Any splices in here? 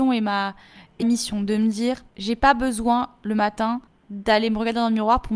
yes; 3 cuts; at 1.0 s, 2.1 s, 3.9 s

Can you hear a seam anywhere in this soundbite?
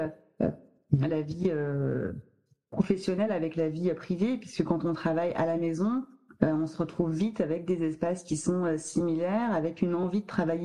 no; 0 cuts

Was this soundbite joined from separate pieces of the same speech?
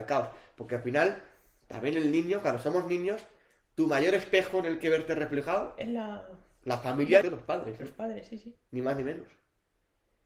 yes; 1 cut; at 7.2 s

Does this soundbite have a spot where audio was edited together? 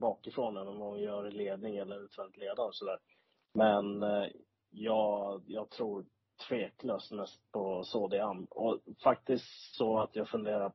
no; 0 cuts

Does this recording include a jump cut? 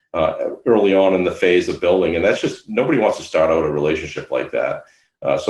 no; 0 cuts

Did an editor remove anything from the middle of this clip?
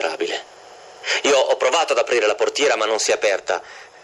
no; 0 cuts

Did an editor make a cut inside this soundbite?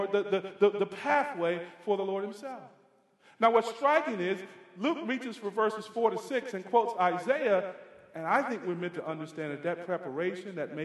no; 0 cuts

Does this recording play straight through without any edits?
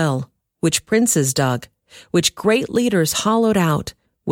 yes; 0 cuts

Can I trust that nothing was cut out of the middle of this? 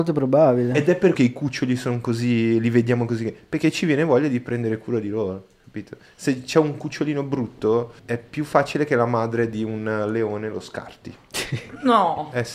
no; 2 cuts; at 1.1 s, 8.0 s

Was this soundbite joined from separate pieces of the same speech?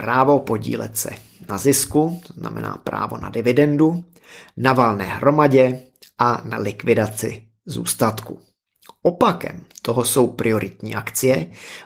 no; 0 cuts

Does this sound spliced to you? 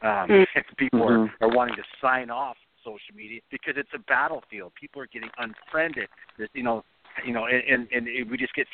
yes; 1 cut; at 3.4 s

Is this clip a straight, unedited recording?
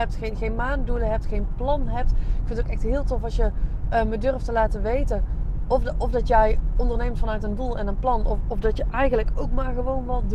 yes; 0 cuts

